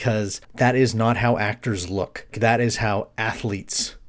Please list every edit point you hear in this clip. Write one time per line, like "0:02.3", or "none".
0:02.3